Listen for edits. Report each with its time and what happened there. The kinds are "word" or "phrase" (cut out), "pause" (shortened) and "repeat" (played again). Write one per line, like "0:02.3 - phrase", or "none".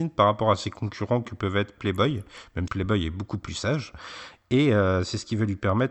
0:02.7 - word